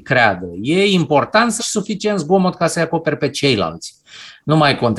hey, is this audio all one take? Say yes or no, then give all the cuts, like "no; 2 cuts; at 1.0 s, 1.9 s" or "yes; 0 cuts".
no; 1 cut; at 1.6 s